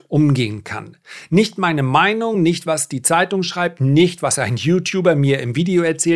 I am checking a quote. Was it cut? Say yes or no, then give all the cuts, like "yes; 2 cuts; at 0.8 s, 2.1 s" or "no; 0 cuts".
no; 0 cuts